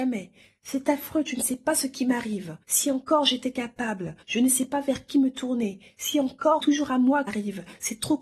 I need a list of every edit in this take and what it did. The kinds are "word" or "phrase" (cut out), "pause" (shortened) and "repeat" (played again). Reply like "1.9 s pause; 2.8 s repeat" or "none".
2.6 s pause; 4.2 s pause; 6.6 s phrase; 7.3 s word